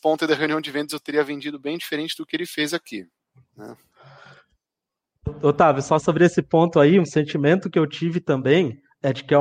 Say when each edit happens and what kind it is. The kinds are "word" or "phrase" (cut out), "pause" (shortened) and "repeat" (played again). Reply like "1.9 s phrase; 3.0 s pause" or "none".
3.3 s pause